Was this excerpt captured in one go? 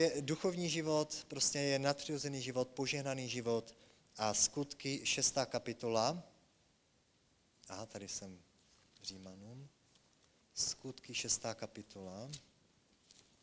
yes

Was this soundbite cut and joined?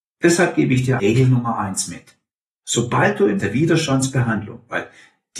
yes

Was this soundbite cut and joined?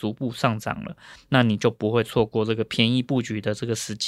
no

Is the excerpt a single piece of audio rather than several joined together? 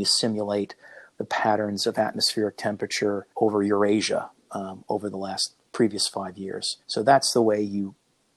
no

